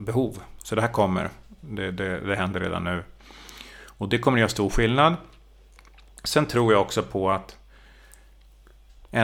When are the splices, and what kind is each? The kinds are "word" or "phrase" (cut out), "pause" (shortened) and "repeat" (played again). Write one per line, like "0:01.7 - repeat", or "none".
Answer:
none